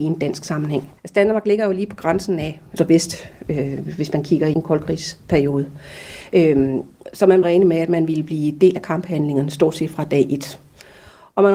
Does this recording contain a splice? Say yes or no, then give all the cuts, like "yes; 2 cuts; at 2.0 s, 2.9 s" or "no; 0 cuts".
yes; 4 cuts; at 1.0 s, 2.8 s, 4.5 s, 7.4 s